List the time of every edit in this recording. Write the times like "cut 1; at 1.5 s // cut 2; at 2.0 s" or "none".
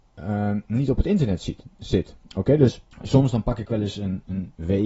cut 1; at 2.2 s // cut 2; at 2.9 s